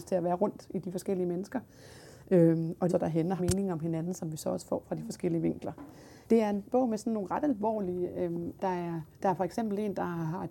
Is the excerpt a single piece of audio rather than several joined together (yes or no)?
no